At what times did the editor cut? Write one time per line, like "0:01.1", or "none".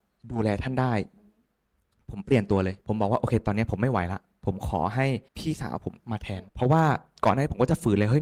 0:02.8
0:05.3
0:06.5